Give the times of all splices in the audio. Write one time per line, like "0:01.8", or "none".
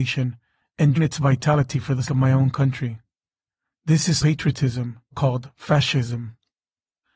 0:01.0
0:02.0
0:04.2
0:05.1